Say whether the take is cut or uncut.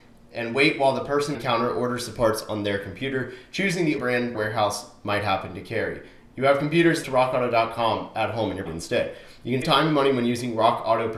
cut